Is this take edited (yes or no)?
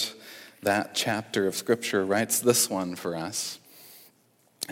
no